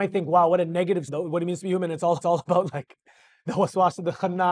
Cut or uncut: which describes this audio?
cut